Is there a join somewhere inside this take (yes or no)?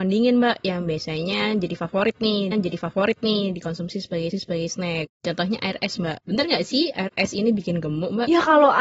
yes